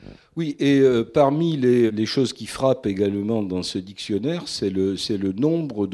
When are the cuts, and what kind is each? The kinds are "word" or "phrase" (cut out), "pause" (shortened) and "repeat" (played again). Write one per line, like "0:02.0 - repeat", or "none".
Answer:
0:01.9 - word